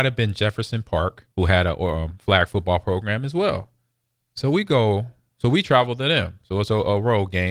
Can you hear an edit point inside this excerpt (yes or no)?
yes